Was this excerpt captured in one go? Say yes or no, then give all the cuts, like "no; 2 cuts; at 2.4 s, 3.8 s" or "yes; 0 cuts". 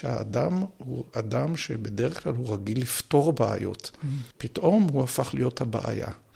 no; 1 cut; at 4.3 s